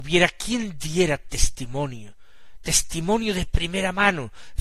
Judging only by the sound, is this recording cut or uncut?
uncut